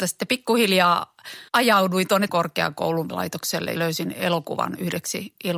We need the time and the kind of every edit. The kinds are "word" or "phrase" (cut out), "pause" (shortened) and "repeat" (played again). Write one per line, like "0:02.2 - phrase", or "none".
0:01.5 - pause
0:02.3 - word
0:03.1 - word
0:03.8 - phrase